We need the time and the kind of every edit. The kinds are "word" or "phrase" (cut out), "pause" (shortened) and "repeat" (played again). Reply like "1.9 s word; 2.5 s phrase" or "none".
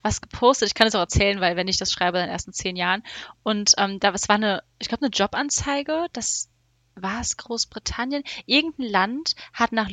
none